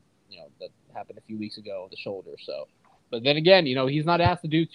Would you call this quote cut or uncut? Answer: cut